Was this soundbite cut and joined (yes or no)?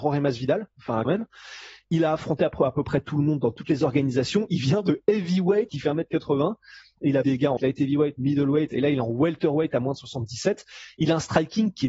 yes